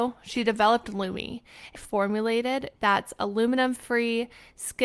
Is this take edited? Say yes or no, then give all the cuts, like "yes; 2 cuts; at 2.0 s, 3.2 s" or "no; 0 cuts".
yes; 2 cuts; at 1.8 s, 2.8 s